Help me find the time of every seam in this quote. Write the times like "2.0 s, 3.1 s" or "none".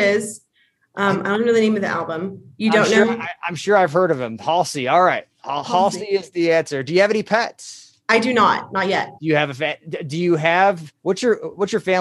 8.0 s, 9.2 s, 11.0 s